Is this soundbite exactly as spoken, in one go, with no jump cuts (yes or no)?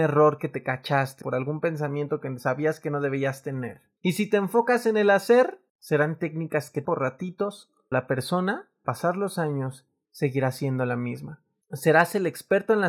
no